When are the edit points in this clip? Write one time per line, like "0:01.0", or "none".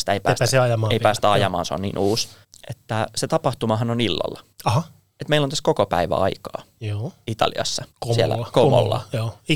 0:02.4
0:04.5
0:07.9